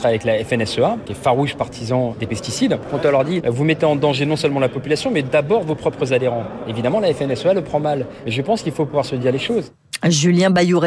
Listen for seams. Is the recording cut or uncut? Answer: uncut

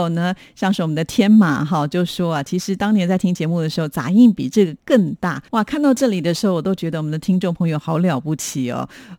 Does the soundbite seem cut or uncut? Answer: cut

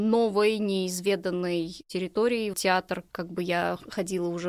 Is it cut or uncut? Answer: cut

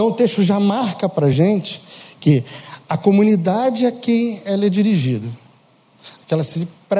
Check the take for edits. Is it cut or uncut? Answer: uncut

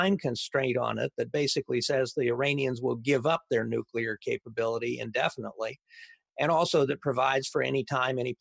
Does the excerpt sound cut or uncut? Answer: uncut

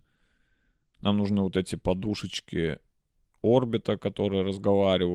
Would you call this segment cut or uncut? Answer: uncut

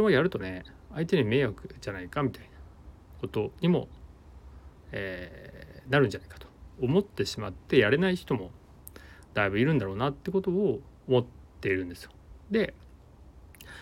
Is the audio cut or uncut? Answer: uncut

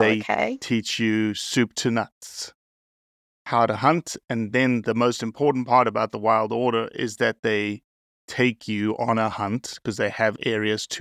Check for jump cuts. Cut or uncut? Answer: uncut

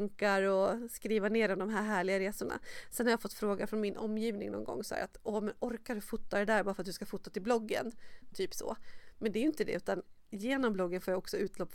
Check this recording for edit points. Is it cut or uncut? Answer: uncut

